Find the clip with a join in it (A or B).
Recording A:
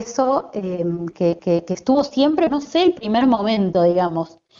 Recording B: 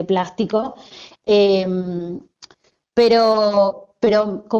A